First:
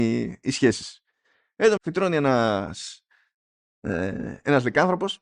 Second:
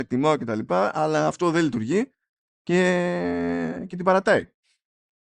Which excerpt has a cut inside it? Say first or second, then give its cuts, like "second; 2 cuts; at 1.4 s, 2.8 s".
first; 1 cut; at 1.8 s